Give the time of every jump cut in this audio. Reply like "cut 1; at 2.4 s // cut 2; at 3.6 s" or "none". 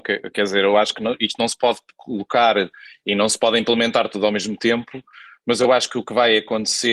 none